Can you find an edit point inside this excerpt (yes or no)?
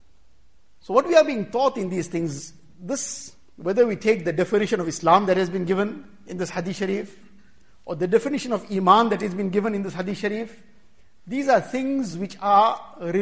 no